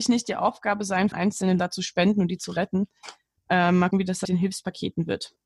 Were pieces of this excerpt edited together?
yes; 4 cuts; at 1.1 s, 1.6 s, 3.9 s, 4.2 s

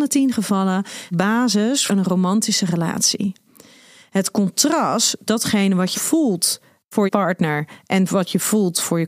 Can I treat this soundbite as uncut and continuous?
no; 5 cuts; at 1.1 s, 1.9 s, 5.3 s, 5.9 s, 7.1 s

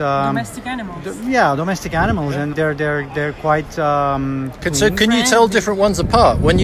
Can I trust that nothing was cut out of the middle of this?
no; 1 cut; at 2.5 s

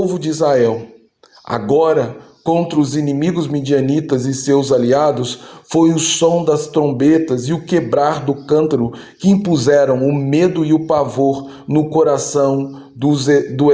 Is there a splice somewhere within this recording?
no; 0 cuts

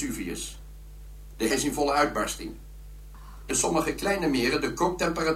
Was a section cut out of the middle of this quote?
yes; 2 cuts; at 1.5 s, 3.5 s

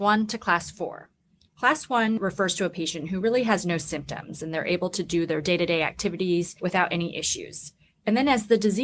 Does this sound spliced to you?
no; 0 cuts

